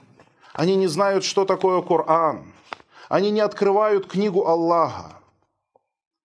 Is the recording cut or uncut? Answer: uncut